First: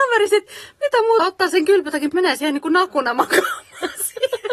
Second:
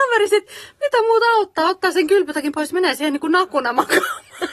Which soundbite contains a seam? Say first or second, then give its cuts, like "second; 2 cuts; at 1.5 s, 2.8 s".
first; 2 cuts; at 1.2 s, 2.1 s